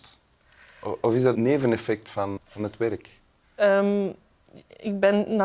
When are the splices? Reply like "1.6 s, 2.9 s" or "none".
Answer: 1.3 s, 2.4 s

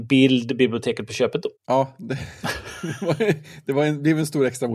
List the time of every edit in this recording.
1.6 s

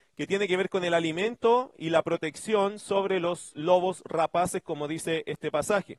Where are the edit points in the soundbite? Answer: none

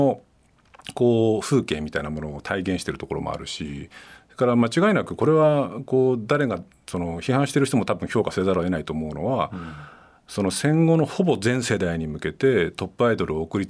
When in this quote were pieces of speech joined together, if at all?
none

